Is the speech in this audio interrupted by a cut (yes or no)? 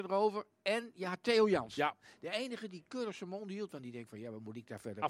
no